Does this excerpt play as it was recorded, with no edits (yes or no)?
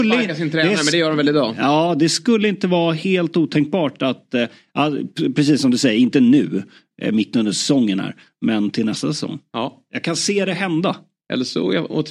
yes